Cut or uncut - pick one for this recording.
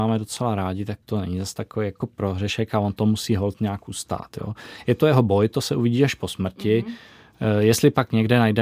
cut